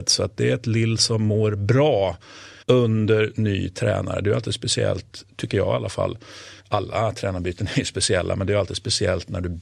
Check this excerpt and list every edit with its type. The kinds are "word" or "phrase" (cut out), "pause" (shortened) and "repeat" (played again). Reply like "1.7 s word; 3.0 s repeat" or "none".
2.6 s pause; 6.6 s pause